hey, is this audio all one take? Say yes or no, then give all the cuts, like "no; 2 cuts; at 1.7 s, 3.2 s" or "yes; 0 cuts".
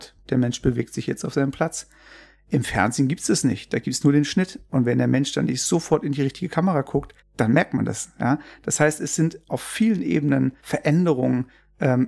no; 2 cuts; at 7.2 s, 10.6 s